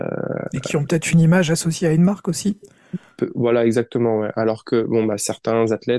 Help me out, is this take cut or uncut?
uncut